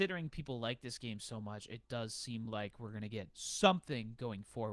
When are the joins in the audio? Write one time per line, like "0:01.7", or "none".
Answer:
none